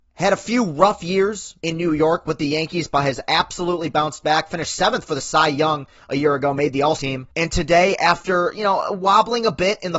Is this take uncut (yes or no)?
no